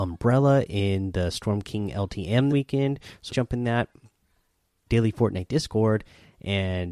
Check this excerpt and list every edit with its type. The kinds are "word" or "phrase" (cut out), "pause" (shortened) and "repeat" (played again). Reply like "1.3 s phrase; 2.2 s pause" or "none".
2.5 s word; 3.3 s word; 4.9 s word